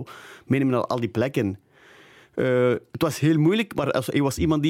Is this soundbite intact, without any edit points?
yes; 0 cuts

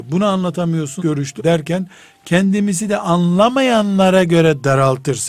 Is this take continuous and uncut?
no; 2 cuts; at 1.0 s, 1.4 s

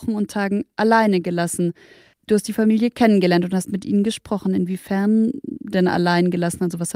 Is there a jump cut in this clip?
no; 0 cuts

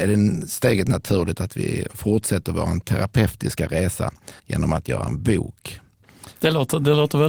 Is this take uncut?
no; 1 cut; at 4.4 s

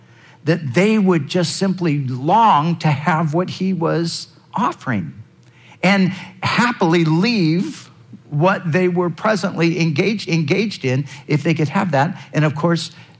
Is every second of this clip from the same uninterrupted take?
no; 1 cut; at 10.3 s

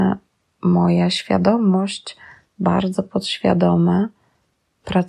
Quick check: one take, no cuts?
no; 1 cut; at 2.5 s

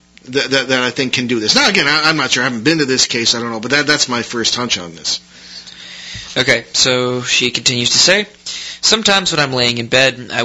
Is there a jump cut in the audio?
no; 0 cuts

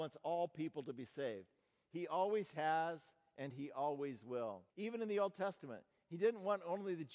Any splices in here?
yes; 1 cut; at 4.7 s

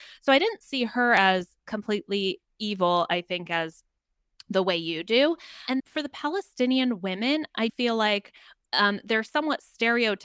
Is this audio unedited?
no; 2 cuts; at 5.8 s, 7.7 s

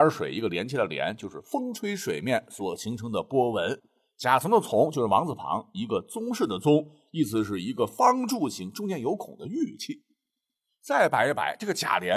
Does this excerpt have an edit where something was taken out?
no; 0 cuts

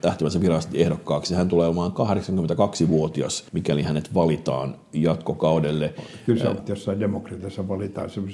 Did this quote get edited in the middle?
yes; 2 cuts; at 3.5 s, 6.6 s

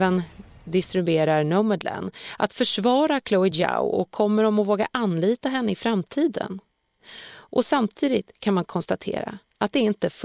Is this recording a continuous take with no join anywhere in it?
yes; 0 cuts

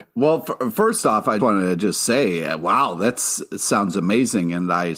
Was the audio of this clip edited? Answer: yes; 1 cut; at 1.4 s

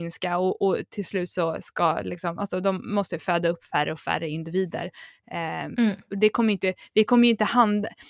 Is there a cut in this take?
no; 0 cuts

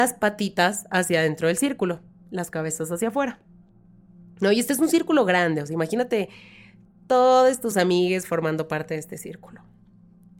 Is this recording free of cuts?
yes; 0 cuts

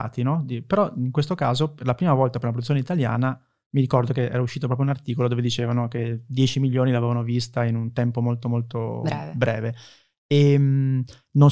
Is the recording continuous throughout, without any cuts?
yes; 0 cuts

